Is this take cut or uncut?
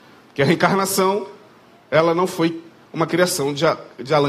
uncut